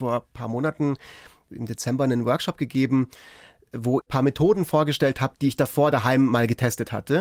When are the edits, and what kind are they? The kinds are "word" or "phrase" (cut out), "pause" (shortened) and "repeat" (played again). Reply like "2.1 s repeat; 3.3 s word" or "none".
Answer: 4.0 s word